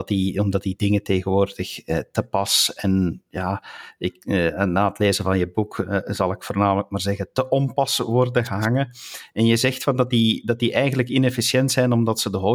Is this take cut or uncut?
uncut